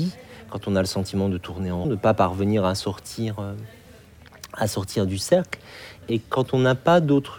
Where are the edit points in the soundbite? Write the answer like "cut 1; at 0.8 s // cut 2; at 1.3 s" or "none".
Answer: cut 1; at 1.8 s // cut 2; at 6.0 s